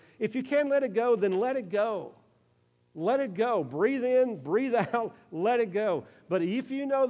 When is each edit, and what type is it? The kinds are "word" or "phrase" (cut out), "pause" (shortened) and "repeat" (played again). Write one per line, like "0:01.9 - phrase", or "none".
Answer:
none

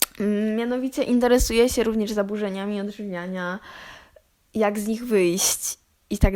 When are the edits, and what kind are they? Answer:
none

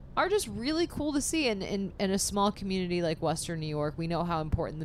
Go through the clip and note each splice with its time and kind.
none

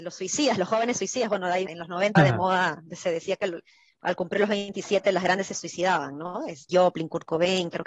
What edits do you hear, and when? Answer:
0:01.7 - word
0:02.2 - word
0:05.5 - word
0:06.7 - word

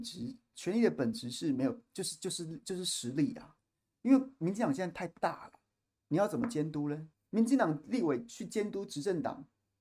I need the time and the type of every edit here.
0:07.1 - pause

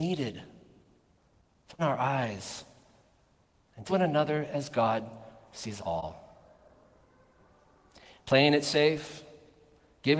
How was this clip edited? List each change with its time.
0:01.8 - word
0:03.9 - word
0:05.8 - word

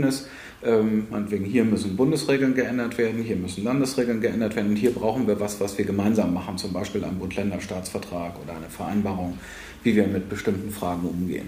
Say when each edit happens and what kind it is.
none

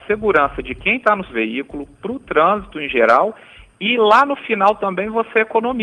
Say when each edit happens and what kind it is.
0:01.3 - word

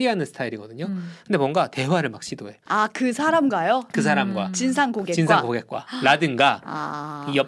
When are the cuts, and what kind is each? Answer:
0:02.6 - pause

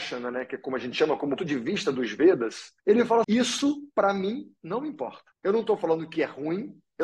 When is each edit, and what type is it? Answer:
0:01.4 - word
0:02.8 - pause
0:03.2 - word
0:05.3 - pause

